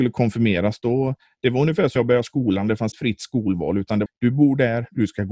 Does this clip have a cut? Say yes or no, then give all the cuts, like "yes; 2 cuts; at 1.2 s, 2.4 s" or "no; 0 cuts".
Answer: yes; 3 cuts; at 2.0 s, 2.9 s, 4.1 s